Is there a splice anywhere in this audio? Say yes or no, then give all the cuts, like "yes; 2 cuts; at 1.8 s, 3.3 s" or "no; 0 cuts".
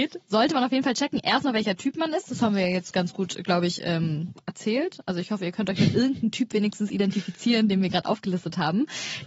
no; 0 cuts